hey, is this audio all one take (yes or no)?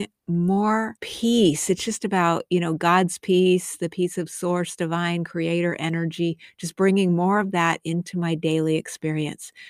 no